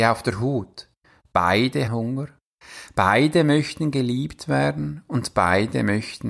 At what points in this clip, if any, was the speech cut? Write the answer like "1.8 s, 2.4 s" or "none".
1.9 s